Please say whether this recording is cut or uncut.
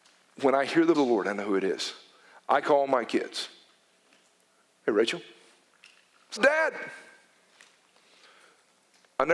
cut